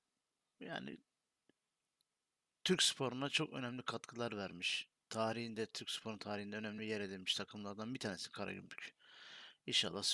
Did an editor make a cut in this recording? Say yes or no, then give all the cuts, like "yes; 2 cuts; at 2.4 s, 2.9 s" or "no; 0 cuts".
no; 0 cuts